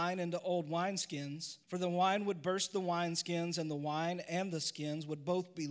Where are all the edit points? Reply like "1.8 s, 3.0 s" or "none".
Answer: 1.6 s